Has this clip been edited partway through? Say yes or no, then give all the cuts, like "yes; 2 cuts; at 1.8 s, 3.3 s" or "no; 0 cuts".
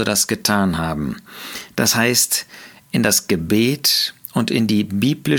no; 0 cuts